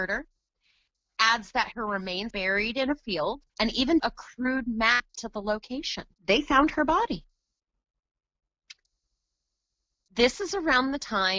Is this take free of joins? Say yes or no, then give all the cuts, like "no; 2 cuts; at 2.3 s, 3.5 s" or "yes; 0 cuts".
no; 4 cuts; at 2.3 s, 3.5 s, 4.0 s, 6.1 s